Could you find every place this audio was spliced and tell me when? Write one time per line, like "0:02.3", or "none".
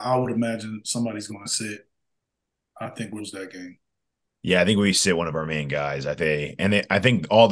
0:03.2
0:04.2
0:06.2